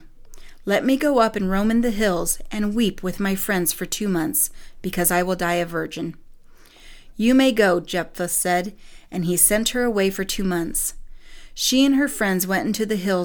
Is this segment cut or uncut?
uncut